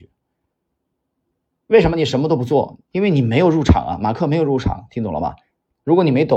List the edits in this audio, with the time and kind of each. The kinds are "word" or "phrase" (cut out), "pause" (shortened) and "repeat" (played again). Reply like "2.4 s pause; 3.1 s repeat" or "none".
2.8 s pause